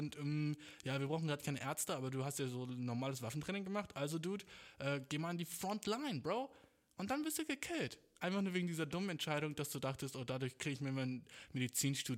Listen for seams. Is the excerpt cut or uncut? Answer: uncut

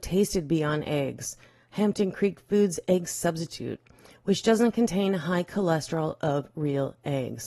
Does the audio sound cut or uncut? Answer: uncut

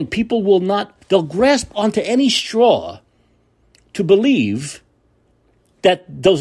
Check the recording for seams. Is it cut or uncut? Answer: uncut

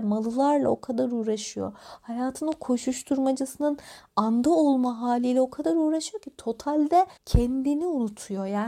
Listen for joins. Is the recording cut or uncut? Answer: cut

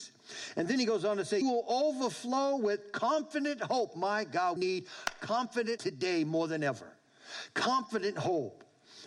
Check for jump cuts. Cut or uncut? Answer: cut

